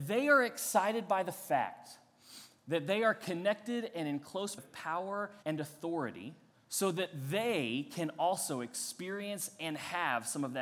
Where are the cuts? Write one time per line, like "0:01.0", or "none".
0:04.6
0:05.4
0:06.5